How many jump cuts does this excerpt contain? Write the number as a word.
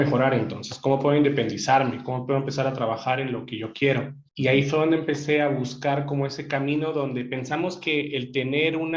one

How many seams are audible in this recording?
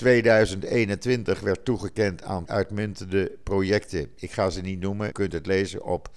two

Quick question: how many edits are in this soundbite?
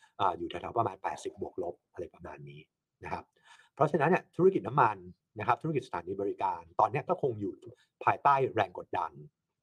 zero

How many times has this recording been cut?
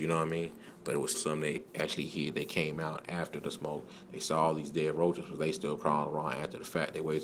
one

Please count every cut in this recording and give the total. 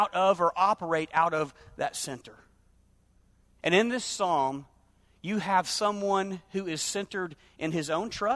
zero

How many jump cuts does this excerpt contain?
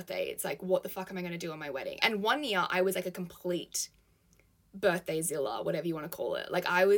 zero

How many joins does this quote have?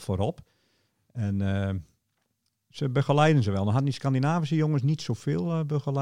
zero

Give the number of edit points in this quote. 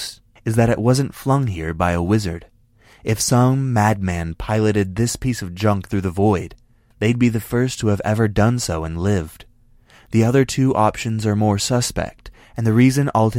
one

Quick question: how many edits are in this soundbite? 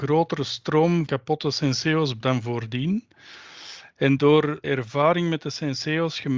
four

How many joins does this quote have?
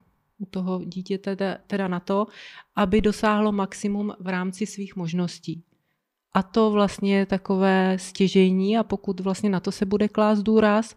zero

